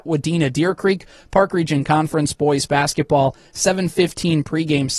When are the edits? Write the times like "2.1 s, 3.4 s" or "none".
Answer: none